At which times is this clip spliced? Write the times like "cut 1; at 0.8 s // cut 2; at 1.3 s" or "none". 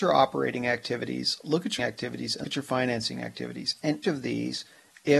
cut 1; at 1.8 s // cut 2; at 2.4 s // cut 3; at 4.0 s